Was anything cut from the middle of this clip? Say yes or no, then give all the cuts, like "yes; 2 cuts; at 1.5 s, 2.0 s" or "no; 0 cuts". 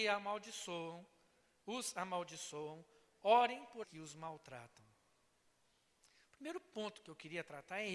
yes; 1 cut; at 3.8 s